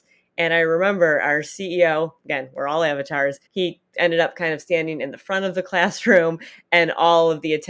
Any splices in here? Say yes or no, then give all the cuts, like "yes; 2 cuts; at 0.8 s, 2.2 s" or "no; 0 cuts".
yes; 1 cut; at 3.5 s